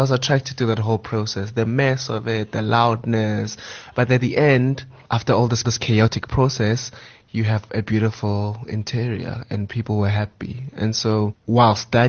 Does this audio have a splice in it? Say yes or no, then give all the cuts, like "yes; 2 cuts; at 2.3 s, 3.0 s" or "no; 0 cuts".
yes; 1 cut; at 5.6 s